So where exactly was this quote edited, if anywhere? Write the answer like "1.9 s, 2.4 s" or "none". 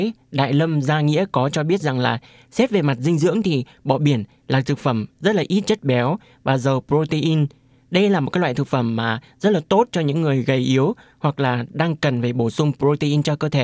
none